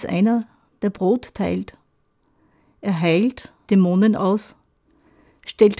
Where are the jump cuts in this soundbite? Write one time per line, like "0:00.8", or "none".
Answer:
0:03.7